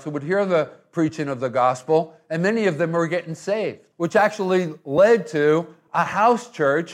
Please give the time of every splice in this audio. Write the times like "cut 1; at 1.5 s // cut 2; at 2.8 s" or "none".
none